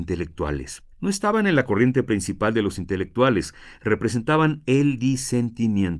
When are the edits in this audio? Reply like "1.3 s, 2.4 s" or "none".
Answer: 0.9 s